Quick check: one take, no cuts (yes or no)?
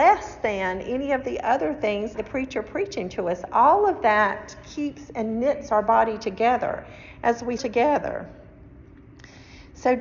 no